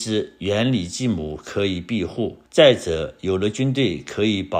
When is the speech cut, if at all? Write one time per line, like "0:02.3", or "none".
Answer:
0:02.5